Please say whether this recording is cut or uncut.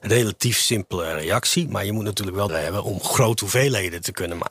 cut